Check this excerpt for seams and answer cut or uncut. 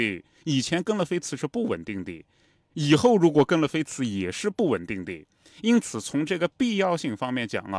uncut